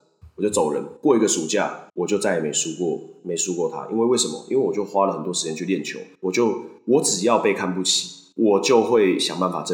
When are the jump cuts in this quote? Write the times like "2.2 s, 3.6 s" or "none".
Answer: 1.0 s, 1.9 s, 6.1 s, 6.8 s, 8.3 s